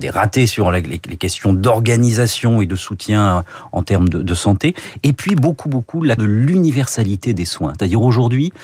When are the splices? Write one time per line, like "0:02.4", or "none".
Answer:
0:05.6
0:06.2

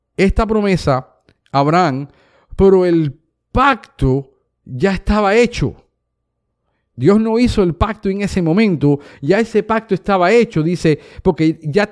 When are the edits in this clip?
none

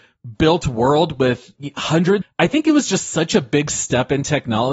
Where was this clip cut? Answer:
0:02.2

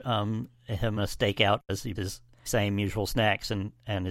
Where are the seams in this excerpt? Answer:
0:01.0
0:02.0
0:02.5

